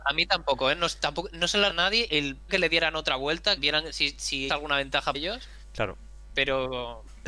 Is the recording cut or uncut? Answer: cut